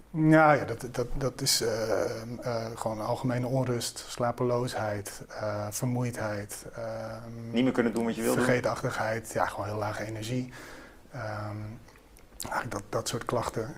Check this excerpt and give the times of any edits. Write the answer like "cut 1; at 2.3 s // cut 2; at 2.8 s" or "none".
none